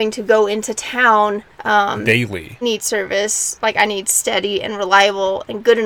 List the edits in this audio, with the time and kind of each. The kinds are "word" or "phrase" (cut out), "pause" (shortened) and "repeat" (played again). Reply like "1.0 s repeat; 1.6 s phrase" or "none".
1.5 s pause; 2.6 s phrase